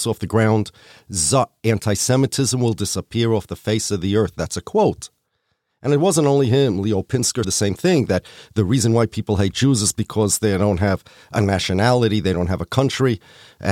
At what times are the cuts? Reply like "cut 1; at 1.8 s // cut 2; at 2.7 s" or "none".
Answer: cut 1; at 7.4 s